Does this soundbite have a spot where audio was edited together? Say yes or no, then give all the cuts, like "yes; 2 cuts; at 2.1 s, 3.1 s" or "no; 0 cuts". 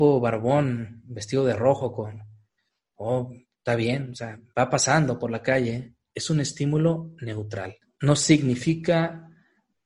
no; 0 cuts